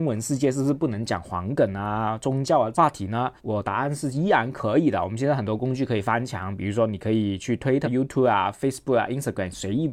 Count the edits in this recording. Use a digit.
2